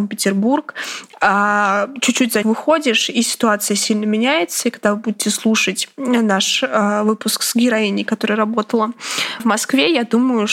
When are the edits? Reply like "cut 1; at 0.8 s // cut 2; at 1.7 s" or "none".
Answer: cut 1; at 2.4 s // cut 2; at 9.4 s